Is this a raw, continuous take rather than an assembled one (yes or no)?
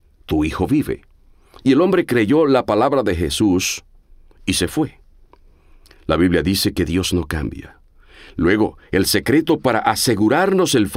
yes